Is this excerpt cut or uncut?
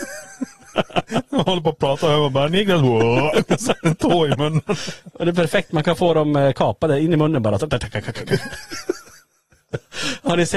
uncut